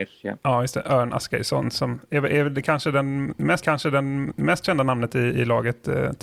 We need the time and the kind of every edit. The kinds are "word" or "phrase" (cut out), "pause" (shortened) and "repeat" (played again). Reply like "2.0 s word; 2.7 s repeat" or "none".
3.6 s repeat